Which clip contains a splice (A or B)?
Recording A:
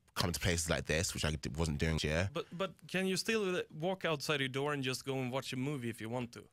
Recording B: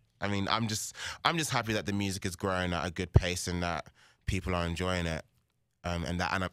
A